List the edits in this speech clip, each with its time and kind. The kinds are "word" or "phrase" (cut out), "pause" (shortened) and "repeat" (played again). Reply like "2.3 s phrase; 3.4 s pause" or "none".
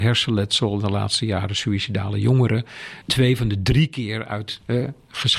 3.0 s word